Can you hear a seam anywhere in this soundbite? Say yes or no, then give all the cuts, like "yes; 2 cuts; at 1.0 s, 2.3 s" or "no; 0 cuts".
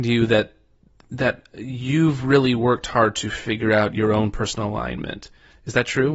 no; 0 cuts